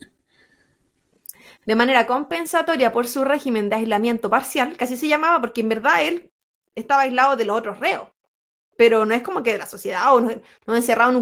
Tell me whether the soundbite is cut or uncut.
uncut